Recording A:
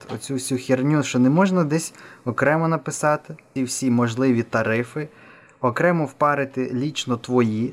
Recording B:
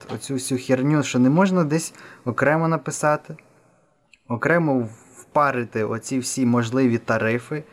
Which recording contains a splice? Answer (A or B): A